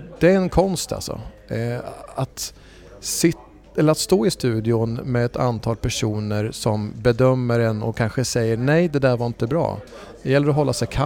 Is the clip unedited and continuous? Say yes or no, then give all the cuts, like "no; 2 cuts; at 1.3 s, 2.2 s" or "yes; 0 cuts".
yes; 0 cuts